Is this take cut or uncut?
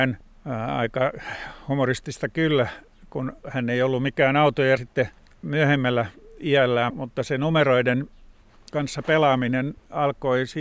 cut